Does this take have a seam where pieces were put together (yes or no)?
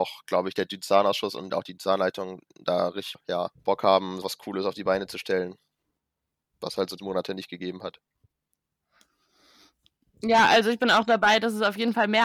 yes